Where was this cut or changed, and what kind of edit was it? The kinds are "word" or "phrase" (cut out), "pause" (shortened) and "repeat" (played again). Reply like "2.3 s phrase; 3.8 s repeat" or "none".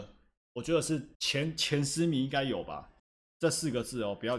1.1 s pause; 3.0 s pause